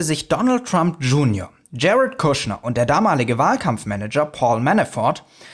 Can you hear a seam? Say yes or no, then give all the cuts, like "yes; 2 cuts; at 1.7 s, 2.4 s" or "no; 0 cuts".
no; 0 cuts